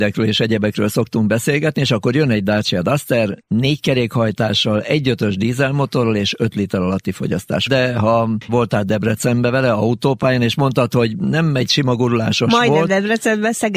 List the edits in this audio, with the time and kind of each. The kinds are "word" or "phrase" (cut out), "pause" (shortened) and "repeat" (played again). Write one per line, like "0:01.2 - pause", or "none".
0:07.7 - phrase
0:08.5 - phrase